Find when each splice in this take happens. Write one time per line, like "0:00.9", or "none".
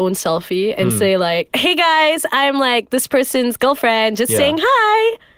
none